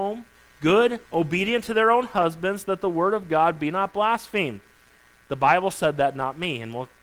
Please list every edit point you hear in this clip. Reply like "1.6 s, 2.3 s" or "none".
1.0 s